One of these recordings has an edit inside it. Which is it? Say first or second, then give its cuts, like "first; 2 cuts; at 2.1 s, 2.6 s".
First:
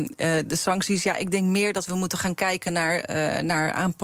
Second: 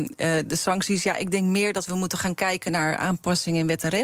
second; 1 cut; at 2.7 s